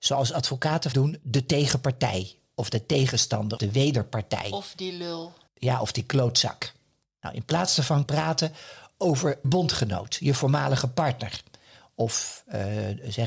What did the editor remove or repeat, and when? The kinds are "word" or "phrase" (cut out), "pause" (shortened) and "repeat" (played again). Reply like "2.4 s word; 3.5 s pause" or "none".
0.9 s word; 3.6 s word; 5.5 s pause; 8.1 s phrase; 9.4 s word